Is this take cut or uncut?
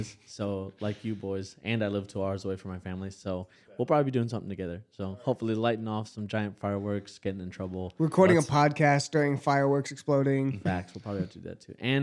uncut